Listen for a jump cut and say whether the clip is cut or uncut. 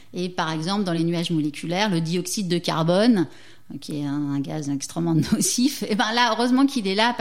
uncut